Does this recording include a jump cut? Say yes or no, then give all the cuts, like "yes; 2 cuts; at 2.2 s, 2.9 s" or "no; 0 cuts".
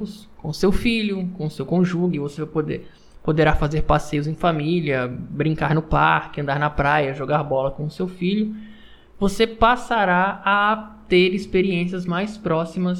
no; 0 cuts